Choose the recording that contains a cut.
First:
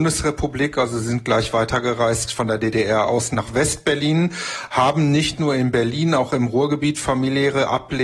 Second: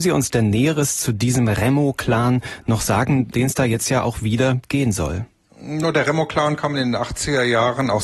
second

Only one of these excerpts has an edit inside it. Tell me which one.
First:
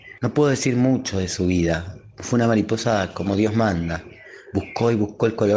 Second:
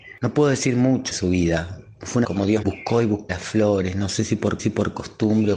second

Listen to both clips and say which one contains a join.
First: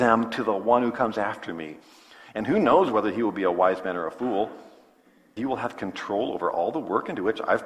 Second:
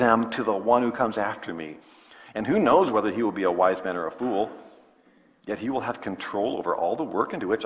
first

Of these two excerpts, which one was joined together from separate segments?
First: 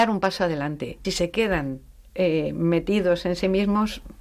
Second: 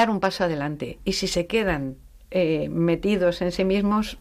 first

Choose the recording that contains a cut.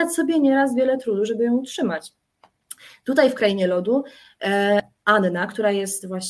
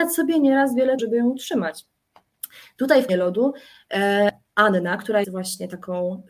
second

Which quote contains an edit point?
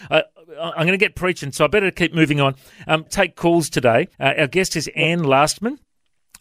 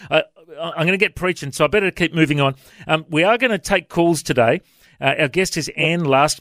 first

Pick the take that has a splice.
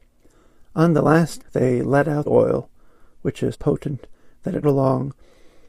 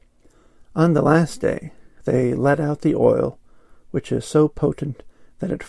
first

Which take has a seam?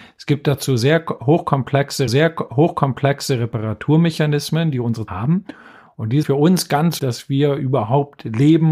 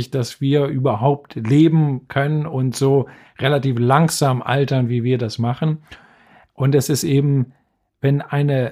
first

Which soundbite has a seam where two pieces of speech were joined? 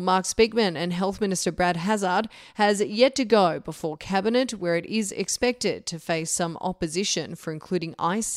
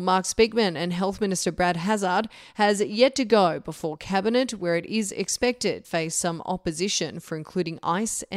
second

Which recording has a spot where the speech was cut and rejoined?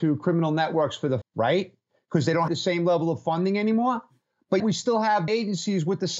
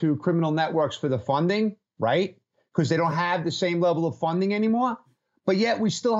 first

